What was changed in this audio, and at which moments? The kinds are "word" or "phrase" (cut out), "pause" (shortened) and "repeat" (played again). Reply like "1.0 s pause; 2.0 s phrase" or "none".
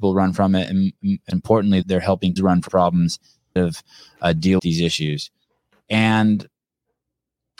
1.3 s word; 1.8 s word; 2.4 s word; 2.7 s word; 3.6 s word; 4.6 s word